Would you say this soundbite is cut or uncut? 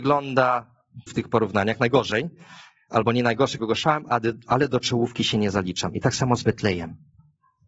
cut